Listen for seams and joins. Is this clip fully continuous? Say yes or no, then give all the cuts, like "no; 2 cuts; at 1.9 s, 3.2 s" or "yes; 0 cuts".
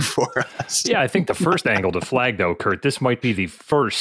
yes; 0 cuts